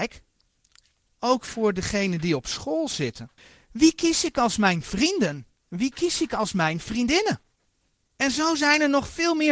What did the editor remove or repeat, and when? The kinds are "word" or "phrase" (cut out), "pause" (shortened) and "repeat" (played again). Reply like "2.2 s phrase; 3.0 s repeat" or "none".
3.4 s pause